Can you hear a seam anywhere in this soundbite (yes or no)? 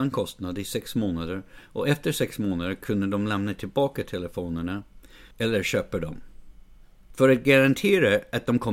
yes